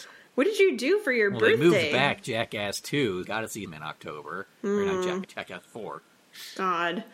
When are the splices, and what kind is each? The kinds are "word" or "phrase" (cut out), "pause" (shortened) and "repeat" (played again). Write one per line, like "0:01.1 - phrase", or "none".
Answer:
0:03.2 - word
0:03.7 - word
0:05.2 - word